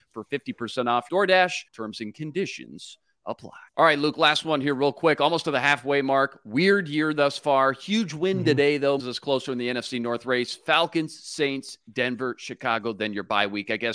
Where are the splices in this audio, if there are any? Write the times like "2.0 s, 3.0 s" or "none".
1.1 s, 1.7 s, 3.7 s, 9.0 s